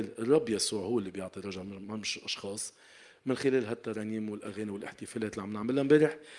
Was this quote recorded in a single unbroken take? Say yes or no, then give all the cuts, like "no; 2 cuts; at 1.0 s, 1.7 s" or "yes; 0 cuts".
yes; 0 cuts